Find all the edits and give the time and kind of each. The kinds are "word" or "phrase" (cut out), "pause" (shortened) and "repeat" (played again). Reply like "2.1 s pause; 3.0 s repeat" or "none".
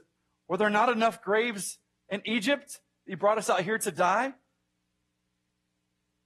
none